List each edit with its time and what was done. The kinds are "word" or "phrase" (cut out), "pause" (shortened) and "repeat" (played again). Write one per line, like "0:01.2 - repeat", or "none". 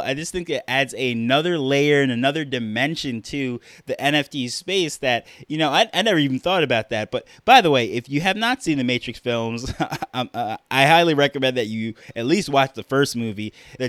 none